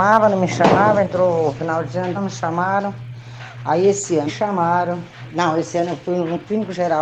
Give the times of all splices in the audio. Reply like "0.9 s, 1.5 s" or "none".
2.1 s, 4.3 s